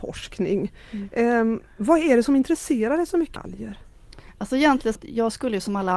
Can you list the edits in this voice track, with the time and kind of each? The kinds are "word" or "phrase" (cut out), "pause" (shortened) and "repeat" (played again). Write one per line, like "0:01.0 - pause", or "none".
0:03.4 - word
0:05.0 - phrase